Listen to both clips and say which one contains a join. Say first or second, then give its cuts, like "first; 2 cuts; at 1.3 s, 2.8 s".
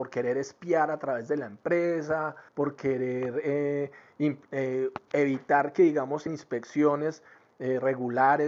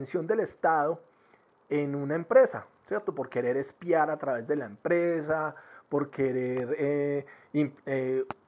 first; 3 cuts; at 2.5 s, 5.1 s, 6.3 s